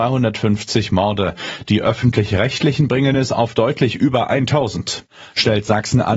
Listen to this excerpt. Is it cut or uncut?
uncut